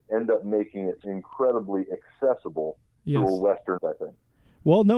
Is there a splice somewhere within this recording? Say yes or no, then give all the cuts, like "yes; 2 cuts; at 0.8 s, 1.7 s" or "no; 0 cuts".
yes; 2 cuts; at 1.0 s, 3.8 s